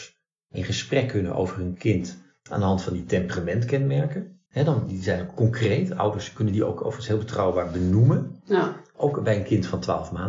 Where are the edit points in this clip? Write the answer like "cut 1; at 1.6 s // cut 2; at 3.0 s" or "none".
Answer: cut 1; at 4.5 s